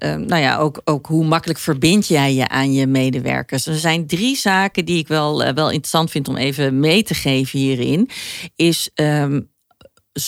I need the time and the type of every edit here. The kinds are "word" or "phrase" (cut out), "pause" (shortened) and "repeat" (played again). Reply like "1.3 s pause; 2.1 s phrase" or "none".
none